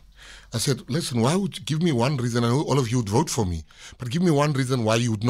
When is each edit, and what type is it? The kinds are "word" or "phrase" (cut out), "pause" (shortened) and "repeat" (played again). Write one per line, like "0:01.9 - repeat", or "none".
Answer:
none